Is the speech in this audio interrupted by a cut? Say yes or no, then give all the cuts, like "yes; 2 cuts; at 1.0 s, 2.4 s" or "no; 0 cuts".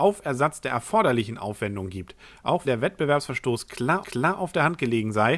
yes; 2 cuts; at 2.6 s, 4.0 s